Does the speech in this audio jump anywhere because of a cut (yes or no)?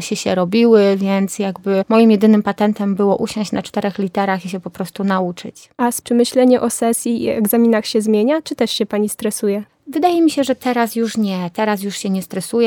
yes